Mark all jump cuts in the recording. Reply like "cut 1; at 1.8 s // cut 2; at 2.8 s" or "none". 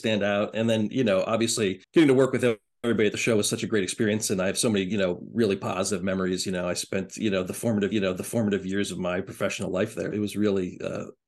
cut 1; at 1.8 s // cut 2; at 7.9 s // cut 3; at 10.1 s